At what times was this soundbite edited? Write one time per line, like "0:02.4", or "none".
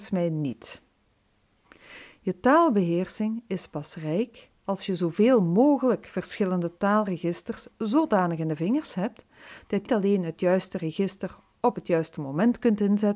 0:09.9